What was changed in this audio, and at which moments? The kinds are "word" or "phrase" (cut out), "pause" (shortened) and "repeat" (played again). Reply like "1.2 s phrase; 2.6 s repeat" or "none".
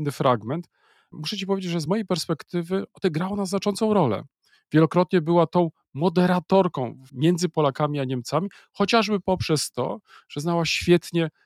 none